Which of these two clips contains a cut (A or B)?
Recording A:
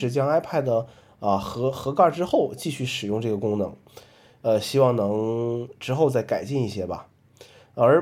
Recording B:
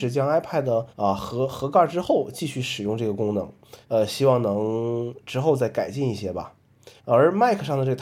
B